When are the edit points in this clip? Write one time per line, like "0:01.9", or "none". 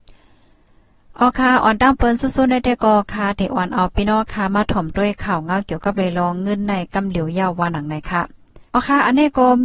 0:08.7